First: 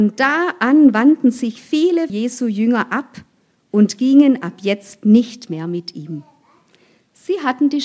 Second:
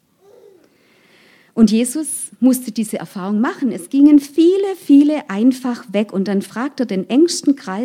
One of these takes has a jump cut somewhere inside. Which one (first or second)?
first